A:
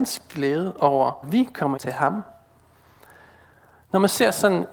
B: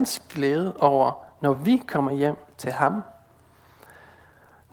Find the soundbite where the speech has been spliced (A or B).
A